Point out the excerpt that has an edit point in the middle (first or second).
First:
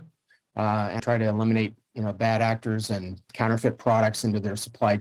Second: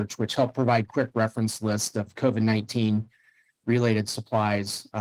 first